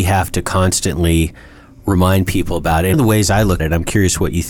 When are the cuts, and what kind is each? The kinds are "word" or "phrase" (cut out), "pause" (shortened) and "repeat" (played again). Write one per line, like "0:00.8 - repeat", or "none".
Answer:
0:02.9 - word
0:03.6 - word